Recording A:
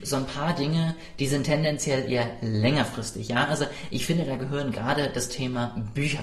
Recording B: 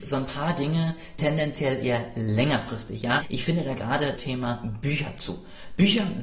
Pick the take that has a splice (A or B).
B